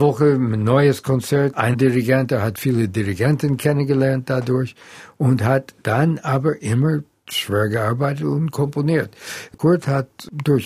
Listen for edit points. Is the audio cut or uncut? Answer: cut